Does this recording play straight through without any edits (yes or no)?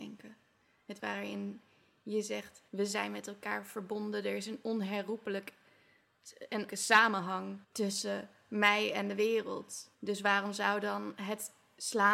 no